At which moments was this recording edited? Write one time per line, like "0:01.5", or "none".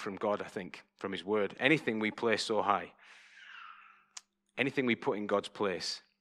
none